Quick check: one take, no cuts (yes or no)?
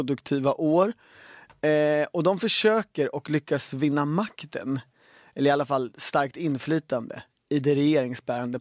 yes